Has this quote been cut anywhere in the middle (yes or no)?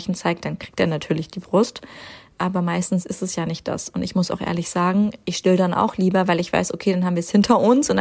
no